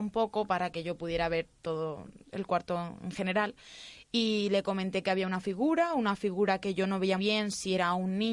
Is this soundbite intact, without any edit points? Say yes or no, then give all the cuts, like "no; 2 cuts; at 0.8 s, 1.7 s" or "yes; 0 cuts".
no; 1 cut; at 7.2 s